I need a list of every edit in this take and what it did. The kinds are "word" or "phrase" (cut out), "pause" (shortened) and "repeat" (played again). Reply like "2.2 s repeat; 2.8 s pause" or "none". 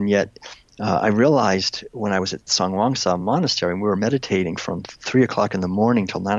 none